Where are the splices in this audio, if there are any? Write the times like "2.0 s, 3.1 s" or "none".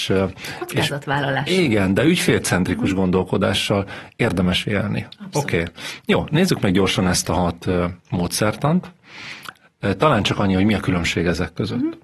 8.0 s